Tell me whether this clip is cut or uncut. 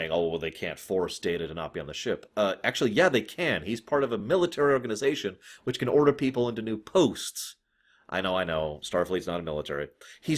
uncut